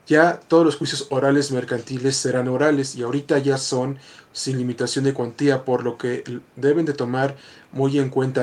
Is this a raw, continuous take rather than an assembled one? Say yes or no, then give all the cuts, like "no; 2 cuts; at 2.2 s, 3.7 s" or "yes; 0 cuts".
yes; 0 cuts